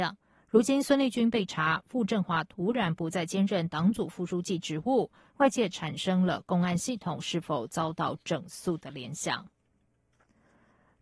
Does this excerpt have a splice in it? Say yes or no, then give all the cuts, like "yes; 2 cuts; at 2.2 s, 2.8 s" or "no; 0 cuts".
no; 0 cuts